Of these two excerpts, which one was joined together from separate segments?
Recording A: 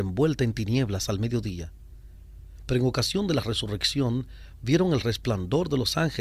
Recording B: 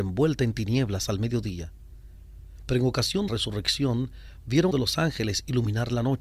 B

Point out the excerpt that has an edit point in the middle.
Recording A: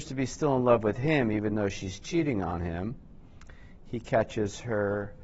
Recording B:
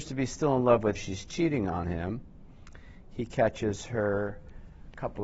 B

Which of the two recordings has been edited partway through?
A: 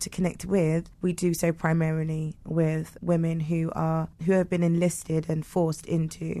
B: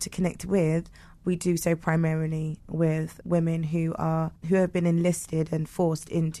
A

